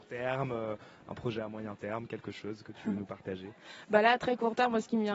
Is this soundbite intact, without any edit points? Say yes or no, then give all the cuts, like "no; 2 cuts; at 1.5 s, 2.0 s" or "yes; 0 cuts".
yes; 0 cuts